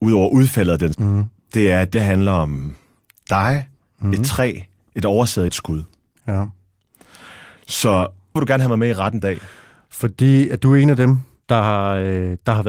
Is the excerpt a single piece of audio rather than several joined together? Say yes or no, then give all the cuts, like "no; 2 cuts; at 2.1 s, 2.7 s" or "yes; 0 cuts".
no; 5 cuts; at 0.9 s, 1.9 s, 5.5 s, 8.4 s, 9.2 s